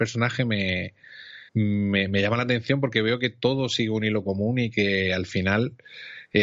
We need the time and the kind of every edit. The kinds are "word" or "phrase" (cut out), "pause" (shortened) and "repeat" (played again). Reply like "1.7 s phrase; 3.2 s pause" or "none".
1.5 s pause